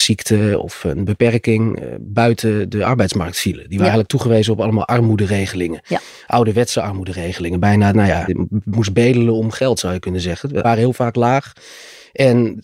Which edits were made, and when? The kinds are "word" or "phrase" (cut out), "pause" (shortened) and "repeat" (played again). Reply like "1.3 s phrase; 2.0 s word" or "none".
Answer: 7.9 s phrase; 8.3 s word; 10.6 s word